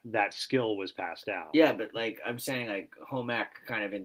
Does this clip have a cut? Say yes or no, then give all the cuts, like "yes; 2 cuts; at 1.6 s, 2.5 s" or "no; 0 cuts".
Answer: no; 0 cuts